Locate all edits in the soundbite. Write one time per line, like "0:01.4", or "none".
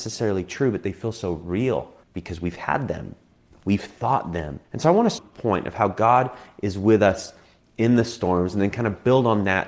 0:02.0
0:04.6
0:05.2